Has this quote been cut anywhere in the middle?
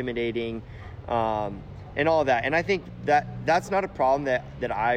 no; 0 cuts

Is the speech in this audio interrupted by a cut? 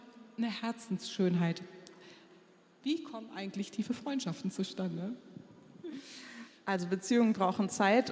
no; 0 cuts

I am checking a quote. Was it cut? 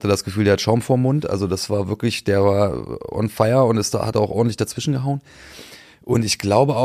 no; 0 cuts

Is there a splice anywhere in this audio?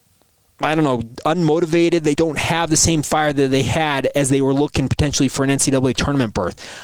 yes; 1 cut; at 2.1 s

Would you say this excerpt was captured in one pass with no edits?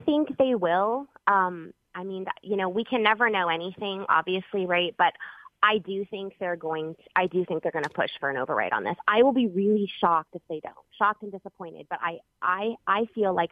yes; 0 cuts

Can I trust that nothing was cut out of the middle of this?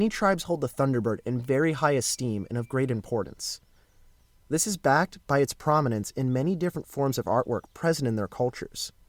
yes; 0 cuts

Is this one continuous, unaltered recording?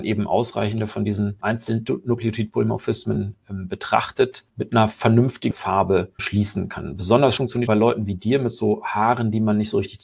no; 4 cuts; at 5.5 s, 6.2 s, 7.4 s, 7.7 s

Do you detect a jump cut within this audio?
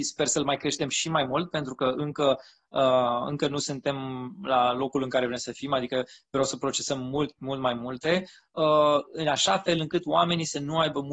no; 0 cuts

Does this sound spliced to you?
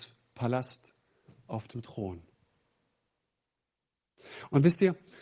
no; 0 cuts

